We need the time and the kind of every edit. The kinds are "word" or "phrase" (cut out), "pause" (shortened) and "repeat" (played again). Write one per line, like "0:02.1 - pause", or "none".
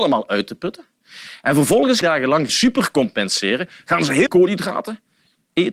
0:02.0 - phrase
0:02.5 - word
0:04.3 - word